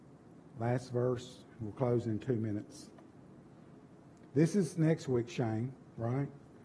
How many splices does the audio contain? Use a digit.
0